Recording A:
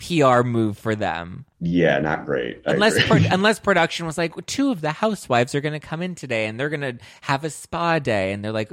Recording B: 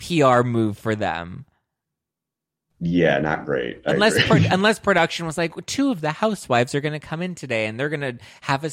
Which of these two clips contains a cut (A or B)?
A